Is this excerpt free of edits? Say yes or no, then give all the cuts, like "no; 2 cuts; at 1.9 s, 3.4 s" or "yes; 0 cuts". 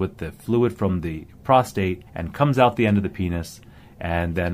no; 1 cut; at 2.1 s